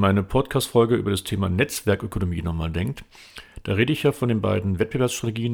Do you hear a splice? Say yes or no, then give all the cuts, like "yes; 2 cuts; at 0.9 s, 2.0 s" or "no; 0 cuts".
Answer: no; 0 cuts